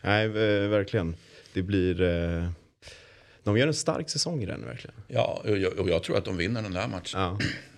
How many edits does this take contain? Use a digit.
0